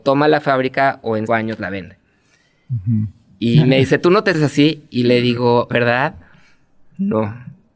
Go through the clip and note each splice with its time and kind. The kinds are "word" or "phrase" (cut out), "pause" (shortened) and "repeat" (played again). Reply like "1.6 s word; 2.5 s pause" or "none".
1.3 s word; 4.3 s word; 5.7 s word

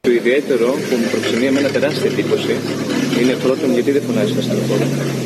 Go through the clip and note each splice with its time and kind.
none

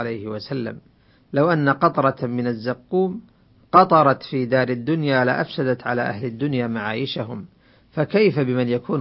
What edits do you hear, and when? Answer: none

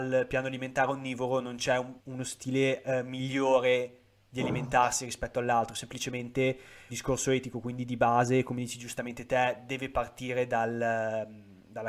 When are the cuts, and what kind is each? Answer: 2.0 s pause; 6.9 s word

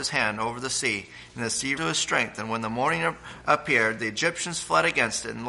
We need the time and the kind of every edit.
1.8 s word

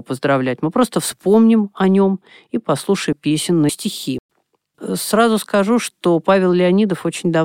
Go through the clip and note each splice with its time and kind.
3.1 s word; 3.7 s word

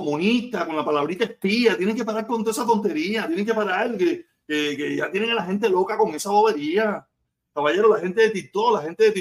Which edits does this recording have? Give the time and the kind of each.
none

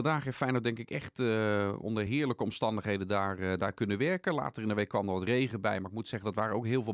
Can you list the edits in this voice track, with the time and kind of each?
none

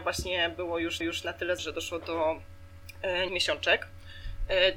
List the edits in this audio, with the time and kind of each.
1.0 s repeat; 1.6 s word; 3.3 s word

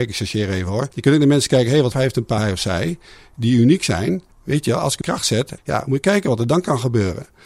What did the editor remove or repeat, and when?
0.9 s pause; 1.9 s word; 2.4 s word; 4.3 s pause; 5.0 s phrase; 5.6 s phrase

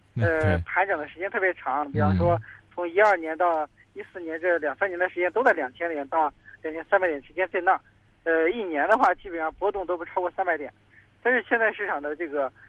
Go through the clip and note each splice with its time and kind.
none

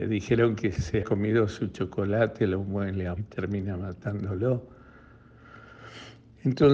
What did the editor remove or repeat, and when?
1.0 s word; 3.2 s word

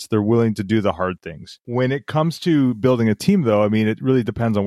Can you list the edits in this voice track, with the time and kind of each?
none

